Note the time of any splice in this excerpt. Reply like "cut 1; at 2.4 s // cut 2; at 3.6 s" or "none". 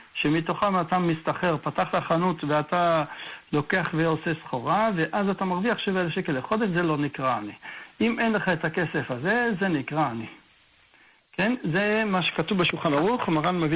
none